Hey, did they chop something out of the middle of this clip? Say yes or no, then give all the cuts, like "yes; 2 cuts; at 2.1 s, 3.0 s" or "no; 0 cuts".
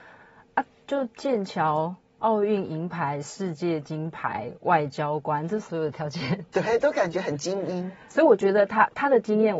yes; 1 cut; at 8.1 s